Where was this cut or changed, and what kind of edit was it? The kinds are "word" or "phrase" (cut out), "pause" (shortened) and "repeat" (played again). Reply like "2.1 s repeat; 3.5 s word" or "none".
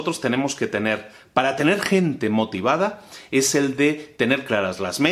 none